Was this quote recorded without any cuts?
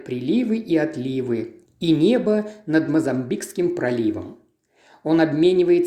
yes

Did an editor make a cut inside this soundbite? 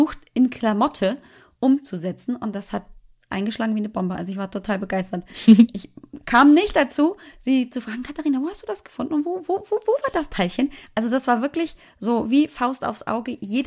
no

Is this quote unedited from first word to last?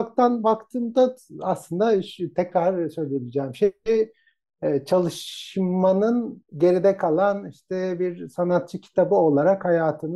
no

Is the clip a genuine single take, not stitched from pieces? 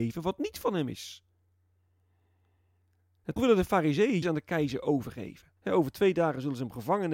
no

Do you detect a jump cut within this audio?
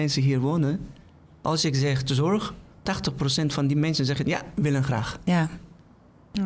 no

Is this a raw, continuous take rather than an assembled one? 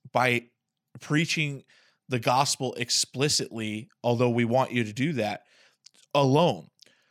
yes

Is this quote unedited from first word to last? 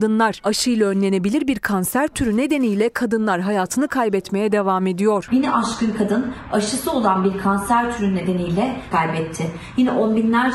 no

